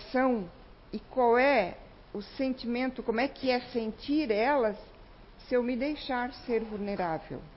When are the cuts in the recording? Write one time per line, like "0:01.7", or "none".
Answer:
none